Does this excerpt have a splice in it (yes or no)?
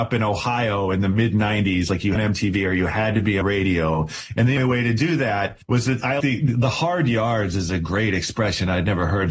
yes